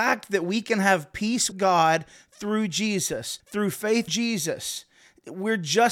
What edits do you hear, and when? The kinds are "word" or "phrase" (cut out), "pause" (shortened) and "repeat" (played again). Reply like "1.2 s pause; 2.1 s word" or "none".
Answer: 1.5 s word; 3.4 s pause; 4.1 s word